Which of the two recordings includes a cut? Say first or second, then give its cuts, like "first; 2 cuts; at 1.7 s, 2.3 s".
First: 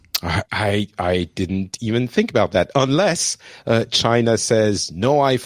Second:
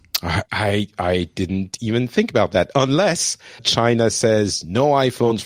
second; 1 cut; at 3.6 s